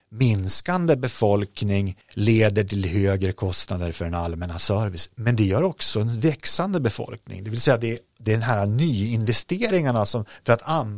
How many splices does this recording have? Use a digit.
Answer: 1